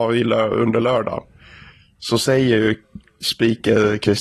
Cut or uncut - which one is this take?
uncut